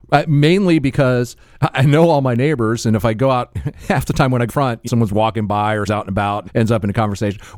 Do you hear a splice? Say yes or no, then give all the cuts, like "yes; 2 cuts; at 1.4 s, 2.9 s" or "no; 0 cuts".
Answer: yes; 4 cuts; at 4.5 s, 4.9 s, 5.9 s, 6.5 s